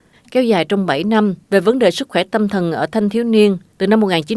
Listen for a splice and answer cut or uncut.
cut